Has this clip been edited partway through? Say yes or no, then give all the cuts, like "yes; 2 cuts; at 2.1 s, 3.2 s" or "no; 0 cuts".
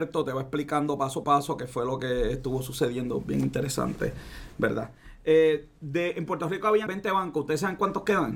yes; 2 cuts; at 1.2 s, 6.9 s